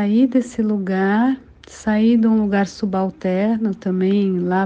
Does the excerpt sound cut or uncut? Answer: uncut